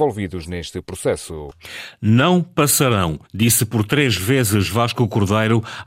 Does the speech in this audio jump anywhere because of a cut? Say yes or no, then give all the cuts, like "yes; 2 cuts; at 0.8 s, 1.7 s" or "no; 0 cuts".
yes; 1 cut; at 3.2 s